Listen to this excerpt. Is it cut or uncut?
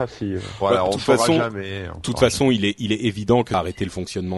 uncut